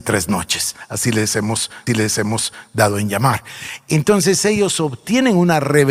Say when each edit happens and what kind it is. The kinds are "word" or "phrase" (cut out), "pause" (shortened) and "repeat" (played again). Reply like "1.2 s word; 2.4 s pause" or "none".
1.9 s repeat